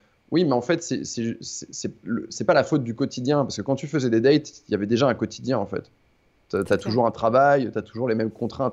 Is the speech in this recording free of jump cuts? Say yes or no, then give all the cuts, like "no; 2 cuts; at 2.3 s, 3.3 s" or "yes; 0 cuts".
yes; 0 cuts